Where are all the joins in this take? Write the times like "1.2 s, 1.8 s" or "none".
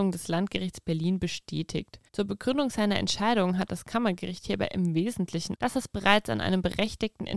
2.1 s, 5.5 s